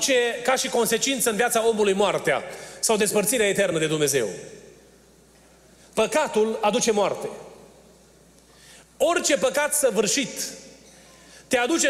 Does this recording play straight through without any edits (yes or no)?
yes